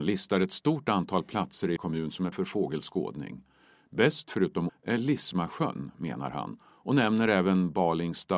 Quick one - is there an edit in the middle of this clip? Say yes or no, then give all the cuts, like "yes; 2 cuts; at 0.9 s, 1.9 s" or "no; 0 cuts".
yes; 3 cuts; at 1.8 s, 2.3 s, 4.7 s